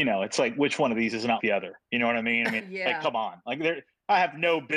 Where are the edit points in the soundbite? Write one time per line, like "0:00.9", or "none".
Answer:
0:01.4
0:02.6